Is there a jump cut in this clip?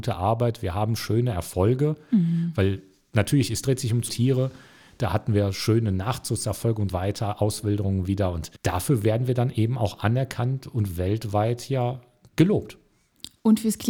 yes; 3 cuts; at 4.1 s, 6.9 s, 8.6 s

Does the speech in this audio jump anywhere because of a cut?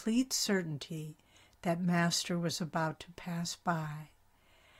no; 0 cuts

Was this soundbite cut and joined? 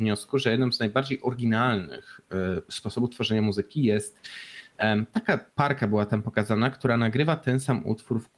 yes; 1 cut; at 5.5 s

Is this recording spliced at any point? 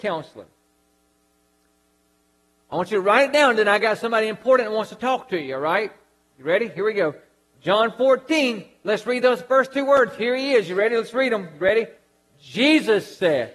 no; 0 cuts

